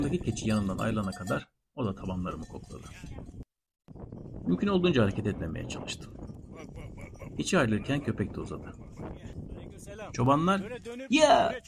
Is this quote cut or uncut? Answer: uncut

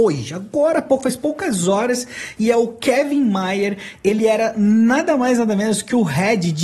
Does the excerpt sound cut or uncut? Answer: uncut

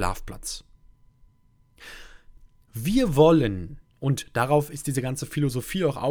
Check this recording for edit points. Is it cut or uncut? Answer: cut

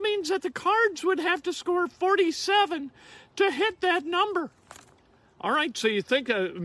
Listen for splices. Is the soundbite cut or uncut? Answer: uncut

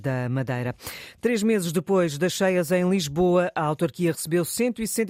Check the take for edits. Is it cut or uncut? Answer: uncut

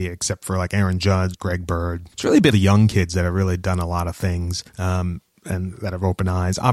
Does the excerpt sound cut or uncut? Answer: cut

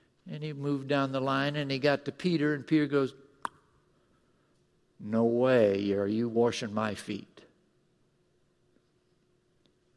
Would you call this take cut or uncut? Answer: uncut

